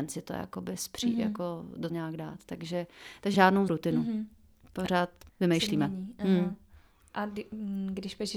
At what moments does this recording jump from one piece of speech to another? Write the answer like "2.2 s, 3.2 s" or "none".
1.9 s, 3.3 s, 3.7 s, 5.3 s